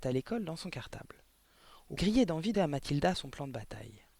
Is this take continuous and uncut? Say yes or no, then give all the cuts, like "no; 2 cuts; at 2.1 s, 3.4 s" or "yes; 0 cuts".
no; 2 cuts; at 2.0 s, 2.5 s